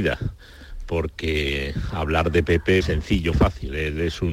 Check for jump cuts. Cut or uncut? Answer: cut